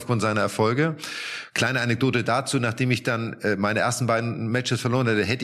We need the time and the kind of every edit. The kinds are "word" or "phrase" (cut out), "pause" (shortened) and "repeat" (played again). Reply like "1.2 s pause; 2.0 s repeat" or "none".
none